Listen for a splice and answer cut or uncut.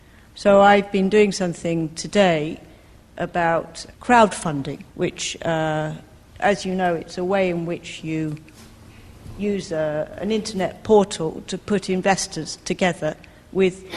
cut